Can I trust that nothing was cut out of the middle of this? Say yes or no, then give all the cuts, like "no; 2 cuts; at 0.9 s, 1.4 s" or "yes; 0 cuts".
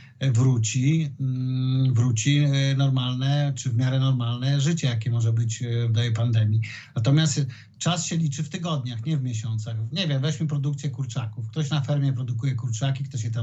yes; 0 cuts